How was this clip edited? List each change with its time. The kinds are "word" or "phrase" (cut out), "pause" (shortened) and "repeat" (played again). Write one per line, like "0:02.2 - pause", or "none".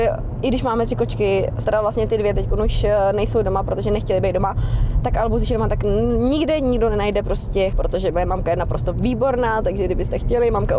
0:01.6 - word
0:07.7 - word